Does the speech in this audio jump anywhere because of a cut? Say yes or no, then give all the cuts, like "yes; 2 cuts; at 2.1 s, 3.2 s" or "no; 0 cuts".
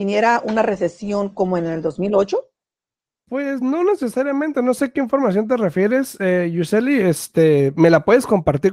no; 0 cuts